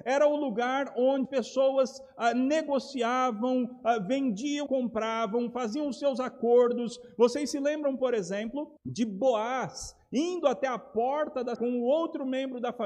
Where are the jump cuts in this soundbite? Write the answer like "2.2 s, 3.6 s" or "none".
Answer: 1.3 s, 4.7 s, 8.8 s, 11.6 s

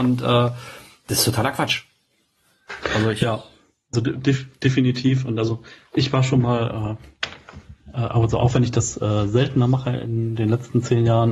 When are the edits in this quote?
3.9 s

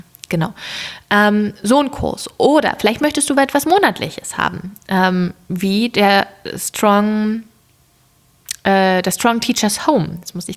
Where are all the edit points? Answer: none

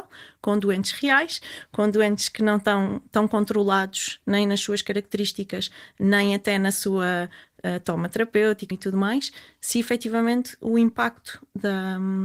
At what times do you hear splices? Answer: 8.7 s

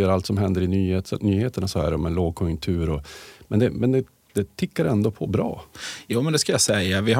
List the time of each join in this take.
none

